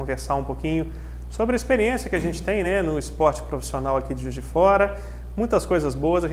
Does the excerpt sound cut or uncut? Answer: uncut